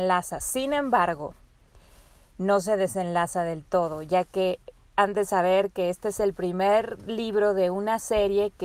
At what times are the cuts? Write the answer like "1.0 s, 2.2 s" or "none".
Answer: 4.9 s

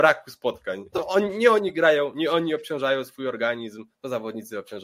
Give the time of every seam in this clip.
0.9 s

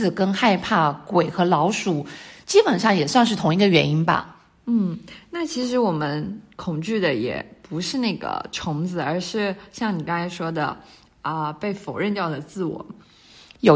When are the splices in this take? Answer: none

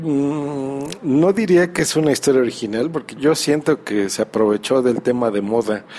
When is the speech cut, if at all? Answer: 3.2 s

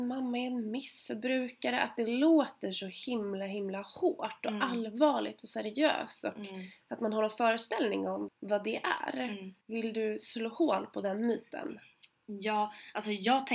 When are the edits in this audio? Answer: 8.3 s, 9.6 s

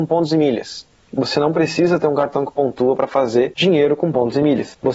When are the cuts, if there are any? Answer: none

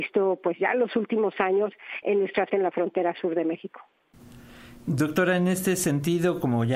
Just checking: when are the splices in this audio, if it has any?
2.0 s, 2.5 s

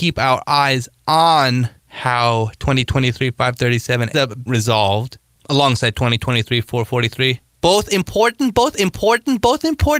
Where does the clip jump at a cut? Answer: 1.8 s, 4.1 s, 4.5 s, 8.7 s

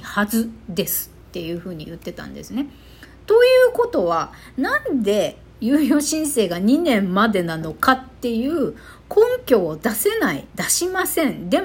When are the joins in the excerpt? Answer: 1.2 s, 10.5 s

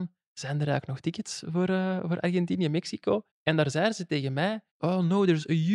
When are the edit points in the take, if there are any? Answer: 3.3 s, 4.7 s

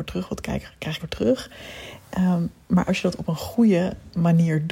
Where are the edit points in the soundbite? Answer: 1.0 s, 2.9 s

